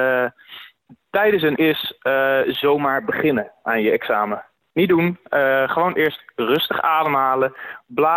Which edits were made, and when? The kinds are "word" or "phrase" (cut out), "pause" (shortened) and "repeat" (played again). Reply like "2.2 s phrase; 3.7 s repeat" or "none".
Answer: 1.6 s word; 6.0 s word